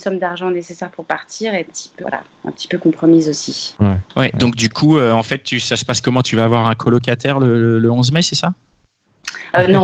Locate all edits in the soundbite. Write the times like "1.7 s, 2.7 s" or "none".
1.7 s, 2.0 s